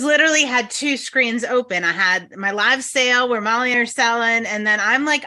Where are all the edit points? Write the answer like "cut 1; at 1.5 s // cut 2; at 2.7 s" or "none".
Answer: cut 1; at 3.7 s

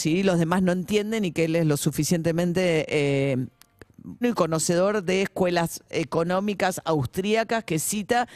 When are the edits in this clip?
cut 1; at 4.2 s

